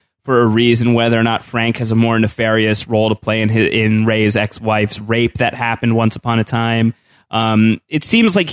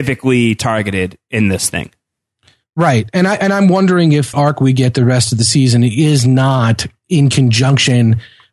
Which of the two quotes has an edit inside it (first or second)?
second